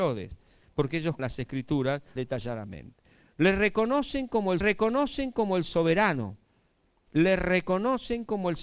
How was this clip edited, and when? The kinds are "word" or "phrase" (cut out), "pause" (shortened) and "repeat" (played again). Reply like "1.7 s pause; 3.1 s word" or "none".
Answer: 1.2 s word; 2.2 s word; 4.6 s repeat